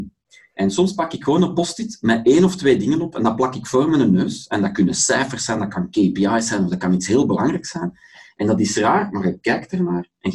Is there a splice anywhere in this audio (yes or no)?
no